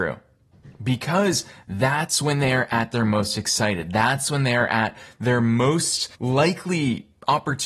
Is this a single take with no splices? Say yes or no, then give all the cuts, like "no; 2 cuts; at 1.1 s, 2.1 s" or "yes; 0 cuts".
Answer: no; 1 cut; at 6.1 s